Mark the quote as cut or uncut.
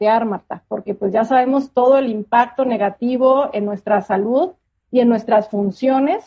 uncut